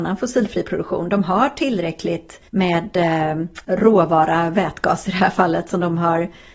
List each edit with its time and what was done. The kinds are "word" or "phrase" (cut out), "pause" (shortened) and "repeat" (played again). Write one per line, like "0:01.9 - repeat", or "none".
0:02.5 - pause
0:03.6 - pause